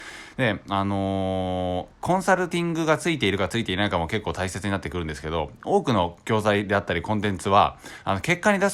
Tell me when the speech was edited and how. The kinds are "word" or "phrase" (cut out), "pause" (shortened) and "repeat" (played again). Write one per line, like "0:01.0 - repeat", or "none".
0:01.9 - pause